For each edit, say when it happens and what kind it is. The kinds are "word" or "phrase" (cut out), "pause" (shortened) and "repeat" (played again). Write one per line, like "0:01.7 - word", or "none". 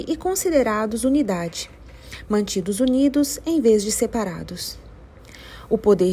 none